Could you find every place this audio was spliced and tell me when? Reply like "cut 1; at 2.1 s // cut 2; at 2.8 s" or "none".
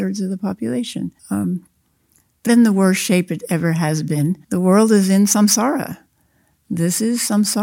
cut 1; at 1.2 s // cut 2; at 2.5 s // cut 3; at 4.4 s